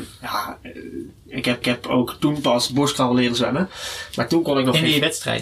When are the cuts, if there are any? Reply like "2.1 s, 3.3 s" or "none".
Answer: 1.6 s